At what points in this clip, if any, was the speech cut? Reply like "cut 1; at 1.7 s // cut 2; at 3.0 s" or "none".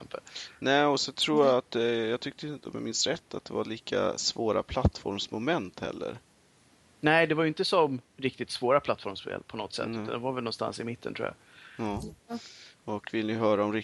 cut 1; at 8.1 s